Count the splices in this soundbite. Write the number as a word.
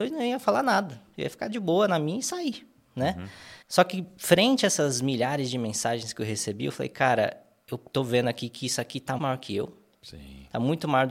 two